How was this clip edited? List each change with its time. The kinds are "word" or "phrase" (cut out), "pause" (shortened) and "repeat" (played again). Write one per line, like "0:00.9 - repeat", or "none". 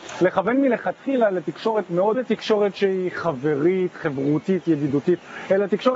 0:02.1 - phrase